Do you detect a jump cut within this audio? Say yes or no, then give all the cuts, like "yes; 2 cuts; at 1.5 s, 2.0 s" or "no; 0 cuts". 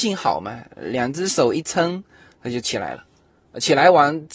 no; 0 cuts